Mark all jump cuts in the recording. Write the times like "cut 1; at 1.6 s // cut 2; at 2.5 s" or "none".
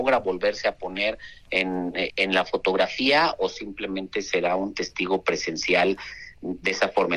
cut 1; at 2.1 s